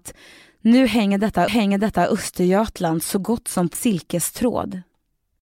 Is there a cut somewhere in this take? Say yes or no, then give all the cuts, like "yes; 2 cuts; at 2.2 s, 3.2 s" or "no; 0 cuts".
yes; 2 cuts; at 1.5 s, 3.7 s